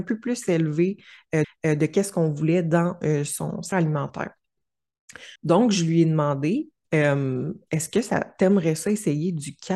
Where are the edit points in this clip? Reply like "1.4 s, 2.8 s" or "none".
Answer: 1.4 s, 3.7 s, 5.4 s, 6.8 s